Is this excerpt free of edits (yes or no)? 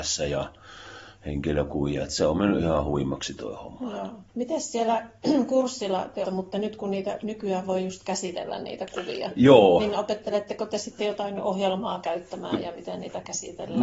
no